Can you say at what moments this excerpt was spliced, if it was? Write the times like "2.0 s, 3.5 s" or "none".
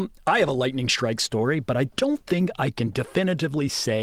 none